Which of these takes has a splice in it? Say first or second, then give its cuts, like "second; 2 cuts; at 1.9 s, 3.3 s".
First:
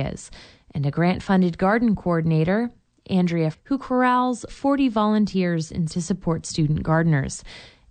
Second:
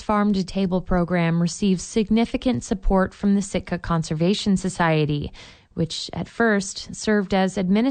first; 3 cuts; at 3.5 s, 4.5 s, 5.9 s